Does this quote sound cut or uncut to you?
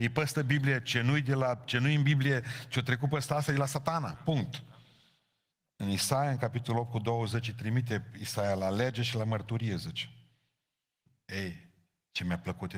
uncut